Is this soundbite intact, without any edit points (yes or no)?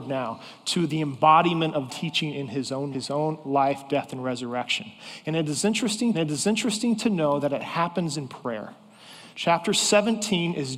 no